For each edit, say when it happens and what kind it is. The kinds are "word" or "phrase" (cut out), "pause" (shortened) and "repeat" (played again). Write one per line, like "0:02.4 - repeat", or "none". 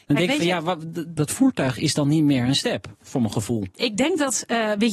0:03.7 - pause